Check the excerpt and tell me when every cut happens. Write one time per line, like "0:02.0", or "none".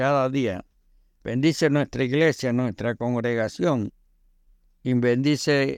none